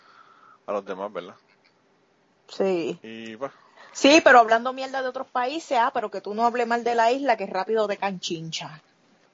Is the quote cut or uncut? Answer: uncut